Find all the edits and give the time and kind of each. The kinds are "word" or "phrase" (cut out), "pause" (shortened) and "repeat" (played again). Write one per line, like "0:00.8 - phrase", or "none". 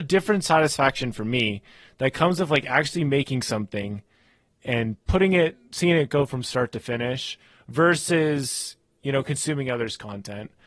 none